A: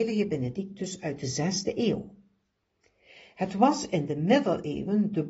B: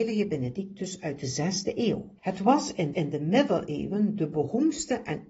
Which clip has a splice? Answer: B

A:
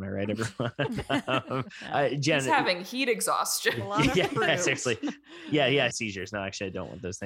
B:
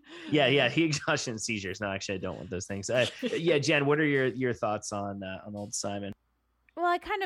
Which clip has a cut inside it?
A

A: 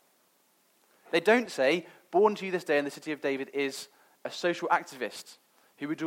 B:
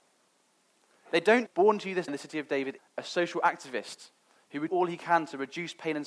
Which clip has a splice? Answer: B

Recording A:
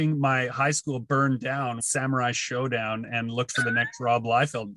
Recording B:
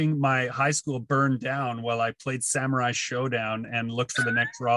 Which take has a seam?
A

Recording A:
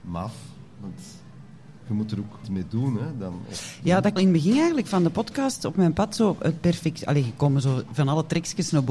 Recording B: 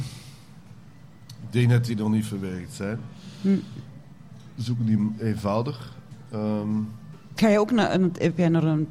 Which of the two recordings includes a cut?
A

